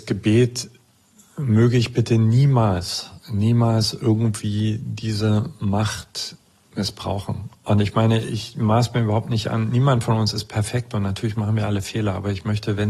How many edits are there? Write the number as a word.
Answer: one